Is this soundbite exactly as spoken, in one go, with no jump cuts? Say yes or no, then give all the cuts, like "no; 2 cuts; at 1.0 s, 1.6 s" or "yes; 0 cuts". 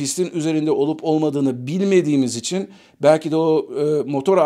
yes; 0 cuts